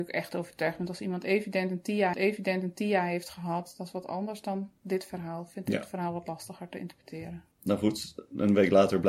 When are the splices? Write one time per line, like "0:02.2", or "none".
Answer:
0:02.1
0:07.5